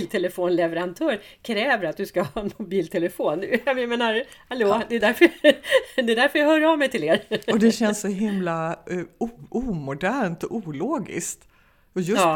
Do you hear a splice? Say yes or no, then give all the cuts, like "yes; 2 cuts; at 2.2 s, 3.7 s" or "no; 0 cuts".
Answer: no; 0 cuts